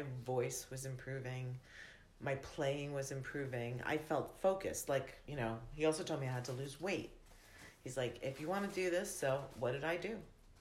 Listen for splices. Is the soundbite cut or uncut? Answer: uncut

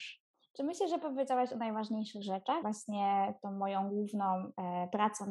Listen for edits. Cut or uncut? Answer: cut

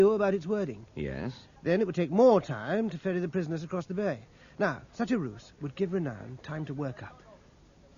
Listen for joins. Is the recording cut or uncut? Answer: cut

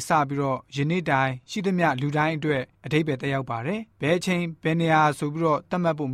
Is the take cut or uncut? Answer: cut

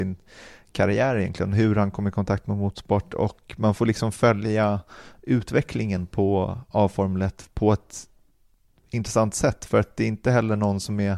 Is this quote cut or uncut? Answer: uncut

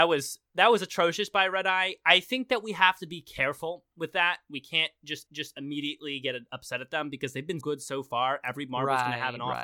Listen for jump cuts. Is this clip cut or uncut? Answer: cut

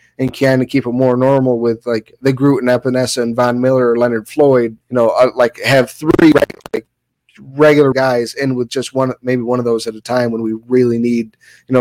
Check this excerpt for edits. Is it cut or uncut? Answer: cut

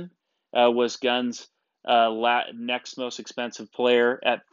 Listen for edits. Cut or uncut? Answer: uncut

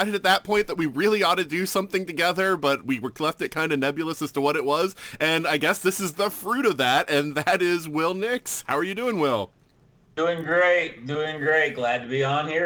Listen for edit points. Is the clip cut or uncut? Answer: uncut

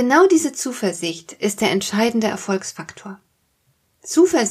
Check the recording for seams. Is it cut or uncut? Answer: uncut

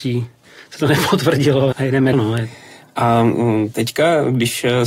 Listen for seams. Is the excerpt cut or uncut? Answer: cut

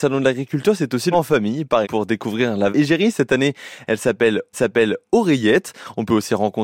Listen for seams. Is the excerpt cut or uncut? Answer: cut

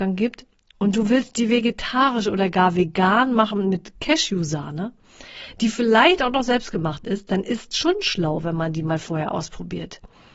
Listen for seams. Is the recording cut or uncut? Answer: uncut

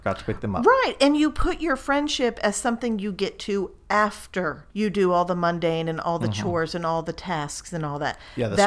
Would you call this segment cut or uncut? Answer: cut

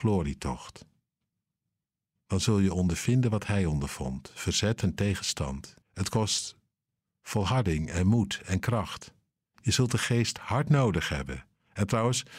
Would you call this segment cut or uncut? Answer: cut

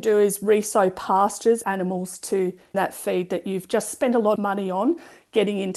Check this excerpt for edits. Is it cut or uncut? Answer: cut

